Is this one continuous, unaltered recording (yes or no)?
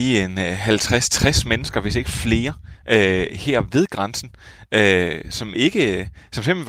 yes